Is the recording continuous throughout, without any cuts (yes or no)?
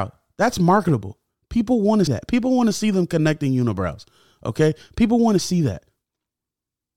no